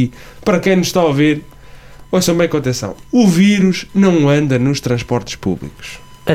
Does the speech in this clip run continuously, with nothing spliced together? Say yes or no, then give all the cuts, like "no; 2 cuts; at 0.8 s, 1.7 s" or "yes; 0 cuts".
yes; 0 cuts